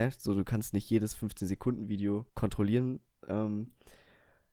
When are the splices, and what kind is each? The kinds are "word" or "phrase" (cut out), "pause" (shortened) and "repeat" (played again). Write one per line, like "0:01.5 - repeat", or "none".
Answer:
0:02.3 - pause